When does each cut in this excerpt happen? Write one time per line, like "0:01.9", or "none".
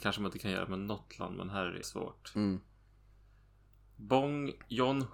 0:01.8